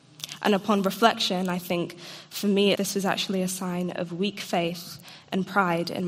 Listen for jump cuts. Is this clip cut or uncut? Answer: cut